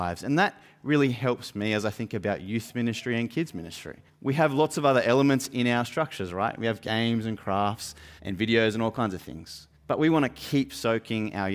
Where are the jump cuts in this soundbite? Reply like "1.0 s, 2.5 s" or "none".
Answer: 4.1 s, 8.2 s, 9.7 s